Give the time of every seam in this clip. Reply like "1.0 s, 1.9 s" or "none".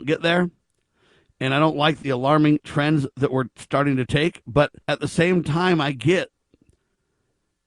4.8 s

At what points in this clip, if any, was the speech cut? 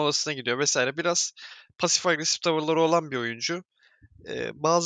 none

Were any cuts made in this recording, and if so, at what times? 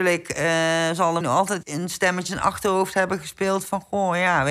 1.2 s, 1.6 s, 2.3 s

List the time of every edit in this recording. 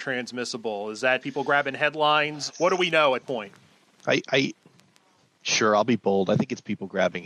1.2 s, 2.5 s, 3.2 s

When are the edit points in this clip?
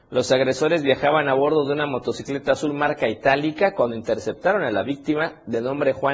none

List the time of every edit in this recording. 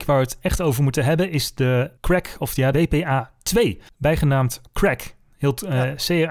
2.7 s

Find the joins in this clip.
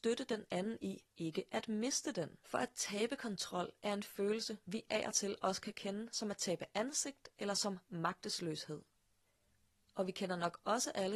2.4 s

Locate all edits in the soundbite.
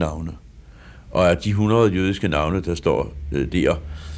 none

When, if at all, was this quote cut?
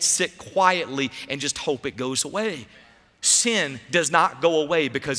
none

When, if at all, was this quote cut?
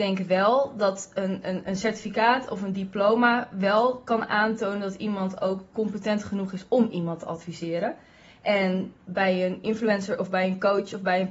none

